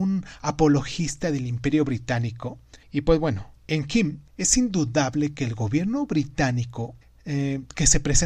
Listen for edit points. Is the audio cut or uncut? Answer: cut